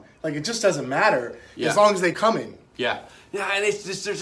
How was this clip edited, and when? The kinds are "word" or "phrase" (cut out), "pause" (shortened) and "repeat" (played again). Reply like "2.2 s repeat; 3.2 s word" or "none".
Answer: 2.1 s word

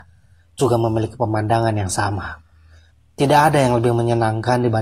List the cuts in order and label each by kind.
none

